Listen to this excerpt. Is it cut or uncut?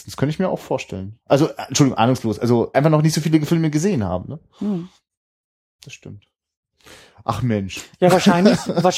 cut